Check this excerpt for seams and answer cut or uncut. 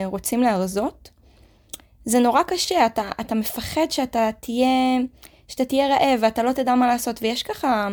uncut